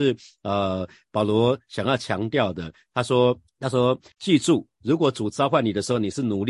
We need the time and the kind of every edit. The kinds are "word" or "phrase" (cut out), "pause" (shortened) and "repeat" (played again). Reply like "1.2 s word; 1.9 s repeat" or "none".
3.5 s pause; 4.1 s word